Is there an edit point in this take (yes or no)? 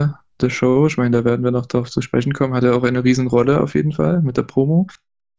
no